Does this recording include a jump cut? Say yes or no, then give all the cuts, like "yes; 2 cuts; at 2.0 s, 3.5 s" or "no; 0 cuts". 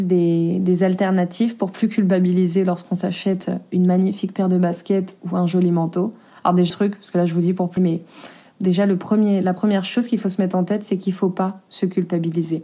yes; 2 cuts; at 6.7 s, 7.8 s